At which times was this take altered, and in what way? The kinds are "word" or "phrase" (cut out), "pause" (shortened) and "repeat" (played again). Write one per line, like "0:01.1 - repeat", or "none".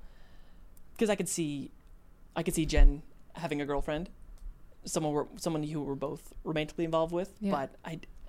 0:02.3 - pause